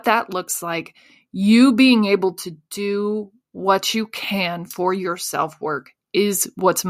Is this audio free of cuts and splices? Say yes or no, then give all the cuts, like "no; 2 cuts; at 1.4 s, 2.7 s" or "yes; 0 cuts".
yes; 0 cuts